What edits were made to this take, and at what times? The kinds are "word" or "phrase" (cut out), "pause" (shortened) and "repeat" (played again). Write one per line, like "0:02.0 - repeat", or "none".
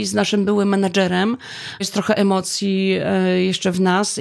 0:01.8 - word